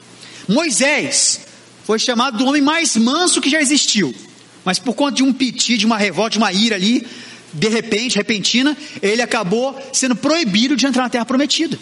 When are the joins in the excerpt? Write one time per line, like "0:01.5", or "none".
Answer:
none